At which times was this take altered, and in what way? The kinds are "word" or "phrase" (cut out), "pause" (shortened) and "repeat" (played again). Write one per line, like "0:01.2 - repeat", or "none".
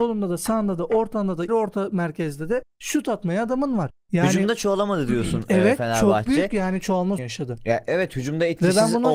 0:01.5 - word
0:07.2 - word